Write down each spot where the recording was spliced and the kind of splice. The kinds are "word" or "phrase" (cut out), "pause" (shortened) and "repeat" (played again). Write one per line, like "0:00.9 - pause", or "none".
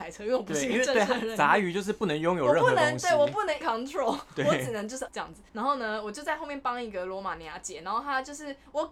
0:03.6 - word
0:05.1 - word
0:05.5 - pause